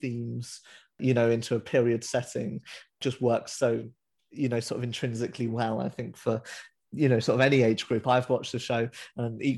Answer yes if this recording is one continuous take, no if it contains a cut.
yes